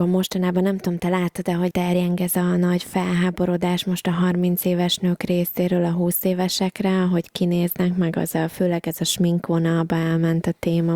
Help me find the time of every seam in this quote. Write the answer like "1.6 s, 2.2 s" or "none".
1.7 s